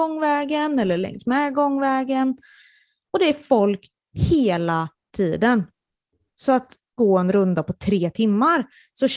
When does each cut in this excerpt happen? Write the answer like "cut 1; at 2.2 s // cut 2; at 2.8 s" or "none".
cut 1; at 7.0 s

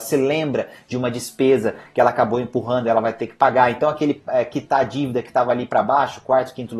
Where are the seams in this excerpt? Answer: none

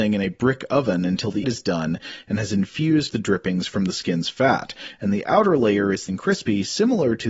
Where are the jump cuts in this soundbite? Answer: cut 1; at 1.4 s // cut 2; at 3.1 s // cut 3; at 6.1 s

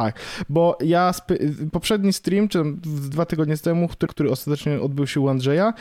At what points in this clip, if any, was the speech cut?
cut 1; at 3.1 s // cut 2; at 4.1 s

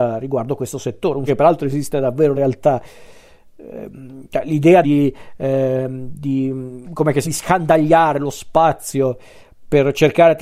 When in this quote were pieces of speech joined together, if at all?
cut 1; at 1.3 s // cut 2; at 2.3 s // cut 3; at 4.8 s // cut 4; at 6.8 s // cut 5; at 7.2 s

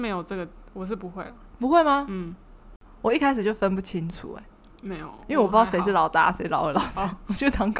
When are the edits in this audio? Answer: none

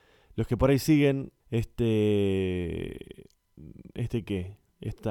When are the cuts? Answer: cut 1; at 1.4 s

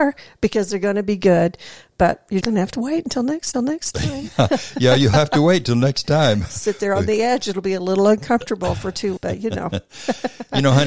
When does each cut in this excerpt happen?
cut 1; at 2.4 s // cut 2; at 3.5 s // cut 3; at 9.2 s

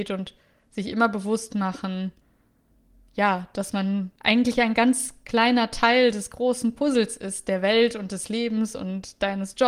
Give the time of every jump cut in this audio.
none

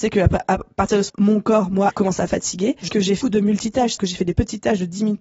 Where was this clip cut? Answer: cut 1; at 1.1 s // cut 2; at 1.9 s // cut 3; at 2.3 s // cut 4; at 2.9 s // cut 5; at 3.2 s // cut 6; at 4.0 s

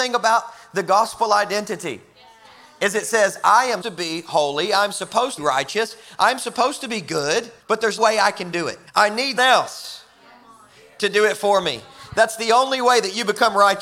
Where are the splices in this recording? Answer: cut 1; at 3.8 s // cut 2; at 5.4 s // cut 3; at 7.6 s // cut 4; at 8.0 s // cut 5; at 8.9 s // cut 6; at 9.4 s

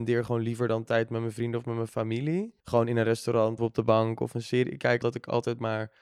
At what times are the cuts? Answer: cut 1; at 2.6 s // cut 2; at 3.6 s // cut 3; at 5.0 s

